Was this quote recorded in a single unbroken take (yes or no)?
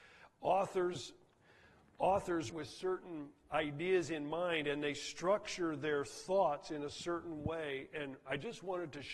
no